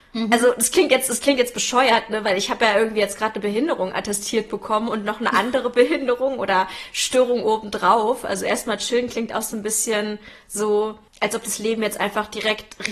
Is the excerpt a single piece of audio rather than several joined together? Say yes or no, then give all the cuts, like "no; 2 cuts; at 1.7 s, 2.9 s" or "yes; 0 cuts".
no; 1 cut; at 11.1 s